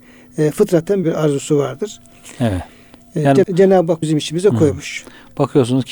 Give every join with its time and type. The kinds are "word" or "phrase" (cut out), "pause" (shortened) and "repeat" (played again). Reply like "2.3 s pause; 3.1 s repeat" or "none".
1.0 s word; 3.4 s word; 4.0 s word